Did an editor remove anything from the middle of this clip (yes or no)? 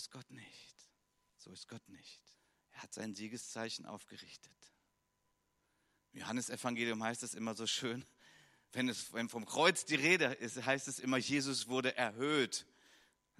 yes